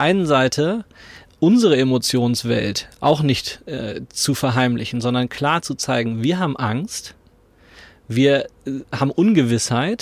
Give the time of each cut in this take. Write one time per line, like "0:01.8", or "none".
none